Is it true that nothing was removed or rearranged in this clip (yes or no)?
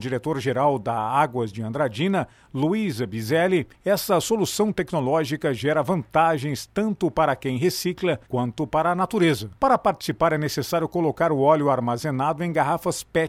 no